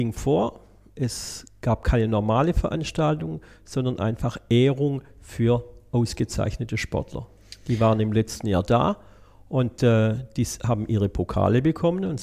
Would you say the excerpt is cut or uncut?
uncut